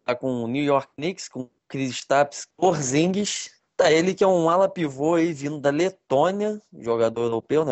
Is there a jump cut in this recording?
no; 0 cuts

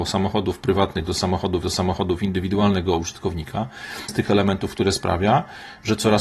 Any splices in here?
yes; 2 cuts; at 1.6 s, 4.1 s

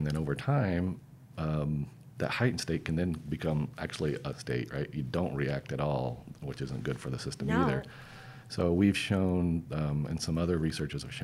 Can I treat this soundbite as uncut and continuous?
no; 1 cut; at 4.3 s

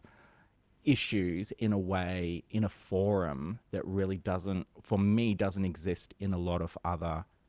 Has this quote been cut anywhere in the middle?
no; 0 cuts

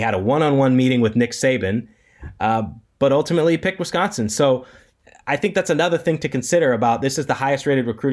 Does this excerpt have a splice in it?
no; 0 cuts

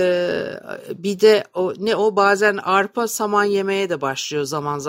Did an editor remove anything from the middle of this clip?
no; 0 cuts

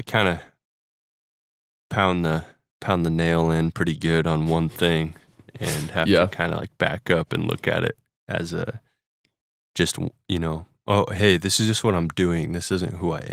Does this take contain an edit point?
no; 0 cuts

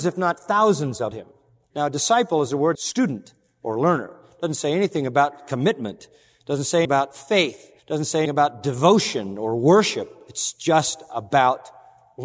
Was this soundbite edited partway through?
yes; 5 cuts; at 1.1 s, 2.7 s, 6.8 s, 7.8 s, 8.3 s

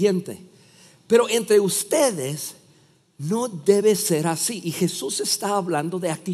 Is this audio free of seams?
yes; 0 cuts

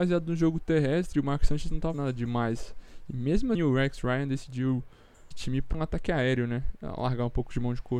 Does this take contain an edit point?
yes; 4 cuts; at 1.9 s, 3.5 s, 5.3 s, 5.7 s

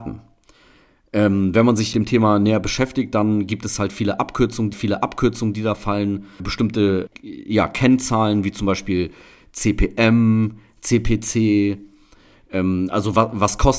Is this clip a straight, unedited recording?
no; 4 cuts; at 1.9 s, 4.7 s, 6.4 s, 7.1 s

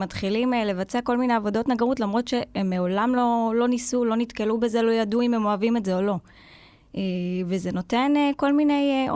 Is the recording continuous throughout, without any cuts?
yes; 0 cuts

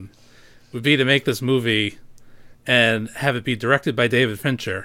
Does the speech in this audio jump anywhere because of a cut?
yes; 1 cut; at 2.5 s

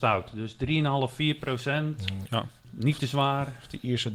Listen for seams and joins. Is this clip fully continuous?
no; 1 cut; at 2.6 s

